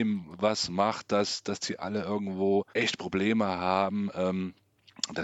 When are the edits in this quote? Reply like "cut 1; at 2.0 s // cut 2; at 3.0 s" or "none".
cut 1; at 2.7 s